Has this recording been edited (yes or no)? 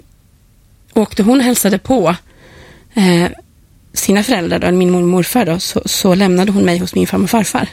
no